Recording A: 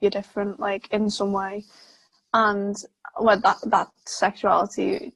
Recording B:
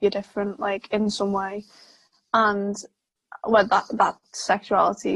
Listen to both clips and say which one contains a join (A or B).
A